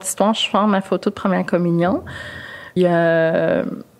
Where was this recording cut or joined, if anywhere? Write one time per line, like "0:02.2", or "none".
0:02.8